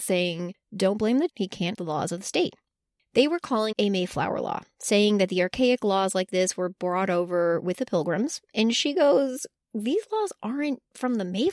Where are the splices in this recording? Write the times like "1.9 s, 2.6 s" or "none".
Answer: 1.3 s, 1.7 s, 3.7 s